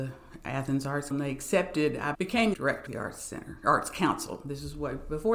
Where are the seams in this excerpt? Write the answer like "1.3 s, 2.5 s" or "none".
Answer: 1.1 s, 2.1 s, 2.5 s, 2.9 s